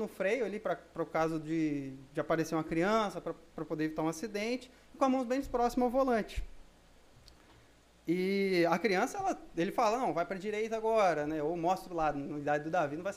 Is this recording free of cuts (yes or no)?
yes